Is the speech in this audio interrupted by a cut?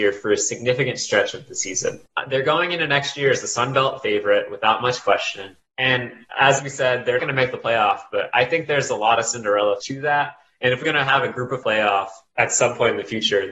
yes; 4 cuts; at 7.2 s, 9.8 s, 10.8 s, 11.6 s

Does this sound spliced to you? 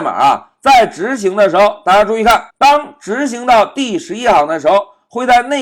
yes; 1 cut; at 2.5 s

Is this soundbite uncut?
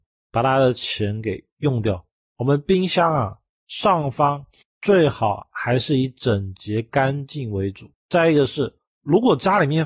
yes; 0 cuts

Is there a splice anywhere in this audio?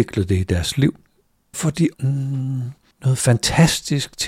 yes; 2 cuts; at 1.5 s, 1.9 s

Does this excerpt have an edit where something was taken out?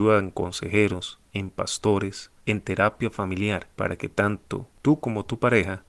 yes; 3 cuts; at 1.3 s, 2.4 s, 3.7 s

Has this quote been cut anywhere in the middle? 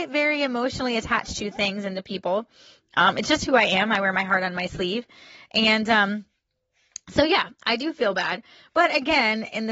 no; 0 cuts

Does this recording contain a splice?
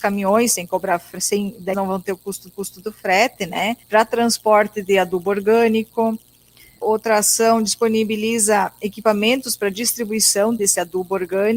yes; 5 cuts; at 1.7 s, 2.5 s, 3.8 s, 6.8 s, 10.6 s

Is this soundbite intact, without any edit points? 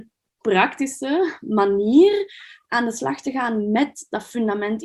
yes; 0 cuts

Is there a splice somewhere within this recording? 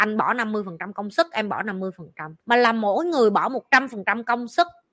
yes; 1 cut; at 2.4 s

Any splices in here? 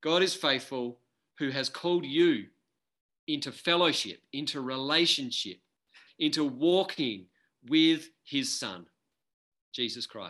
yes; 1 cut; at 6.1 s

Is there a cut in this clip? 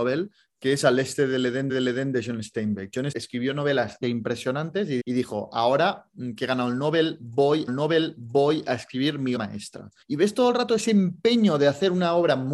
yes; 7 cuts; at 1.7 s, 3.1 s, 4.0 s, 5.0 s, 7.7 s, 9.4 s, 10.0 s

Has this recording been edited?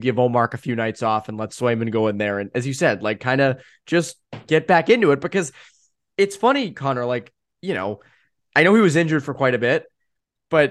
no; 0 cuts

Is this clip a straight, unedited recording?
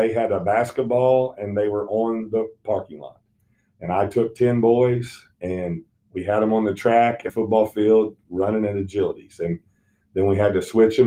no; 1 cut; at 7.3 s

